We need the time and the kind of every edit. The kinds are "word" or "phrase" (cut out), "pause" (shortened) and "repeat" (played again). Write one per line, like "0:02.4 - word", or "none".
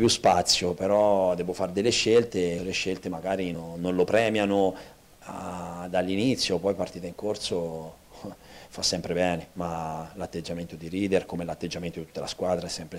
0:02.6 - phrase
0:03.5 - word